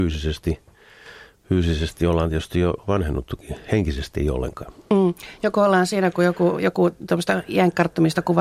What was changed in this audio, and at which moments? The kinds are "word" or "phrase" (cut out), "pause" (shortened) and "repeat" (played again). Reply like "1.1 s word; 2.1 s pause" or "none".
none